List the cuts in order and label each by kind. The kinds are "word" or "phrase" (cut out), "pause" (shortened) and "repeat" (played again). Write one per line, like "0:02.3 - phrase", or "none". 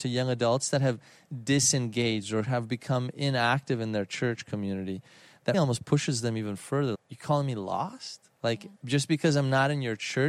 0:05.5 - word
0:06.9 - word
0:08.8 - pause